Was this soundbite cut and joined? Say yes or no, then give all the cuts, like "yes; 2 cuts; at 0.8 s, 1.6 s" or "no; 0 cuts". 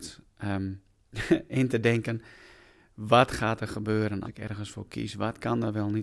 yes; 1 cut; at 4.2 s